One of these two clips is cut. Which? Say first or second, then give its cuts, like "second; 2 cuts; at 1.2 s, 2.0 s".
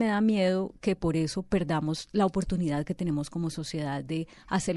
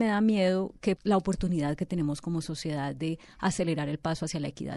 second; 1 cut; at 1.0 s